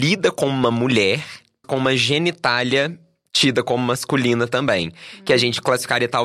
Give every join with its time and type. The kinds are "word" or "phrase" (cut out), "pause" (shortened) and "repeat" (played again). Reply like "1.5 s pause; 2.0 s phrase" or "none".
1.6 s word